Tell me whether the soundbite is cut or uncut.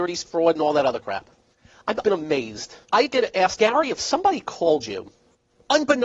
cut